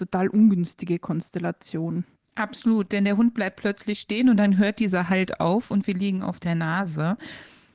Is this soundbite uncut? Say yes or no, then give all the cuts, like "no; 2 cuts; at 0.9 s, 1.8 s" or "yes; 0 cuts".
no; 1 cut; at 2.2 s